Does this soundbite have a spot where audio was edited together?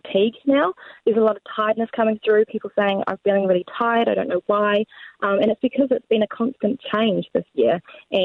no; 0 cuts

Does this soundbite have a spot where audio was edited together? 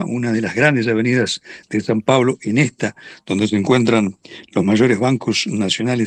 no; 0 cuts

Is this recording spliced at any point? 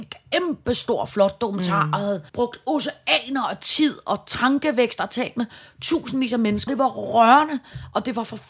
yes; 2 cuts; at 2.3 s, 6.7 s

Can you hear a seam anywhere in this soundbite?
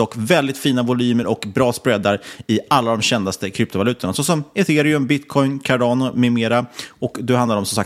no; 0 cuts

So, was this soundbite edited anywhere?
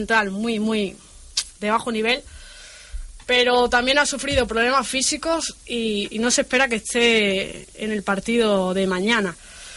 yes; 1 cut; at 1.6 s

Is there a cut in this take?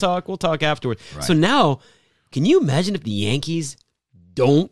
no; 0 cuts

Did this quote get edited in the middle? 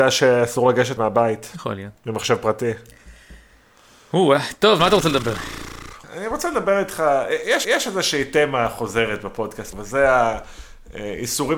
yes; 6 cuts; at 1.0 s, 2.0 s, 4.8 s, 6.0 s, 7.6 s, 9.7 s

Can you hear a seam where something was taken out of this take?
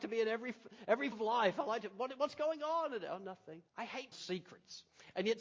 yes; 3 cuts; at 1.1 s, 3.7 s, 4.1 s

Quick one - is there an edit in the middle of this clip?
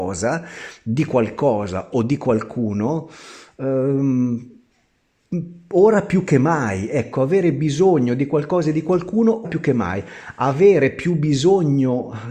yes; 1 cut; at 9.4 s

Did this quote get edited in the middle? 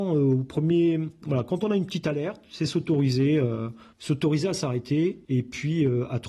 yes; 2 cuts; at 3.9 s, 5.2 s

